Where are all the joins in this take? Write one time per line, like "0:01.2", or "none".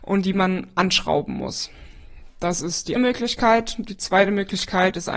0:03.0